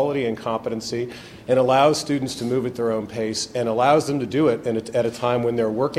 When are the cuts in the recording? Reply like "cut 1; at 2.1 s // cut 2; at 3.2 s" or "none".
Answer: none